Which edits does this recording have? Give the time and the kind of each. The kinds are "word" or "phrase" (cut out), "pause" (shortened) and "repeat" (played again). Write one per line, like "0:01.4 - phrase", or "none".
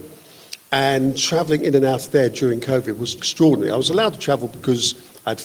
0:03.2 - word

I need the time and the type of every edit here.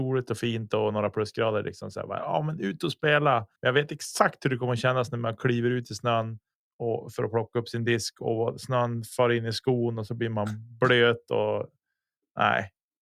0:03.6 - pause
0:06.5 - pause

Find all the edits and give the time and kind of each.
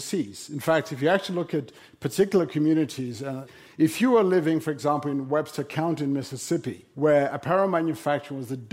none

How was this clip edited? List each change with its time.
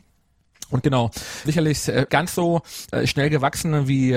0:01.5 - word
0:02.1 - word

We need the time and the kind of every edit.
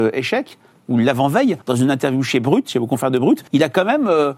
0:01.6 - pause
0:03.5 - pause

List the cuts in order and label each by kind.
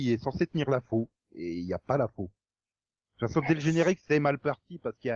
none

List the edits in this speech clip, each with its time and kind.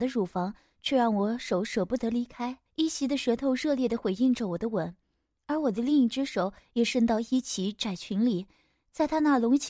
0:02.7 - pause

